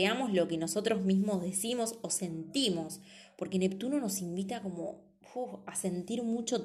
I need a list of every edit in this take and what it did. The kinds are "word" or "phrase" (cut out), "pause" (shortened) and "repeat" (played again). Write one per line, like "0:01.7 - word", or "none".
none